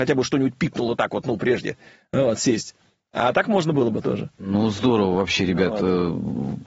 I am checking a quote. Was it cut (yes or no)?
no